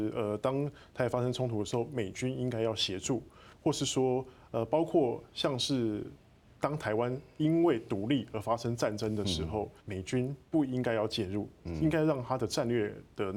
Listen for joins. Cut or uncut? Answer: cut